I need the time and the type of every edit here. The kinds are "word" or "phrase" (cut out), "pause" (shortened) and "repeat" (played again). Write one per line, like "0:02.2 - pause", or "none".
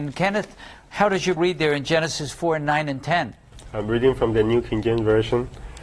0:01.4 - word

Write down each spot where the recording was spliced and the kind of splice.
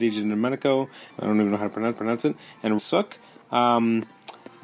0:01.1 - phrase
0:01.9 - repeat
0:02.8 - word

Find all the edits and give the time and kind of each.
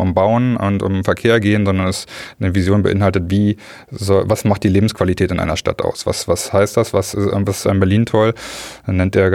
0:07.6 - phrase

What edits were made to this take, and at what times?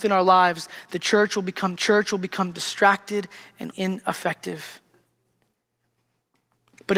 0:01.8 - repeat
0:03.7 - word

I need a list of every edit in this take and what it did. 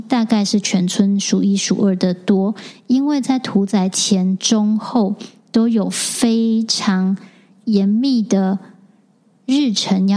none

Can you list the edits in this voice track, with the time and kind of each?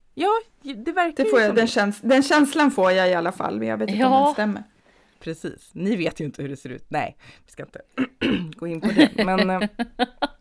none

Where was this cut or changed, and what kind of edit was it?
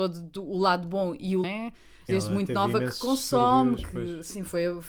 0:01.4 - phrase
0:02.1 - word

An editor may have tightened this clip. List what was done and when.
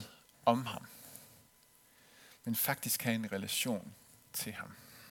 none

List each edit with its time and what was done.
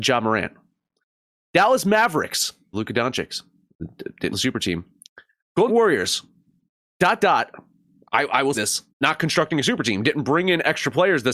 0:02.7 - word
0:04.3 - word
0:05.7 - word
0:07.2 - word
0:08.5 - word
0:08.9 - pause

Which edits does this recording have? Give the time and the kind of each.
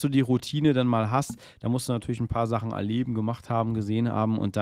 none

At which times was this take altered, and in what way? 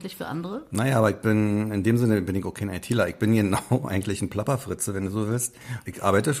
none

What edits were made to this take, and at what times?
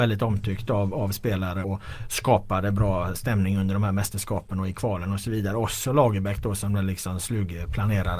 0:01.6 - word

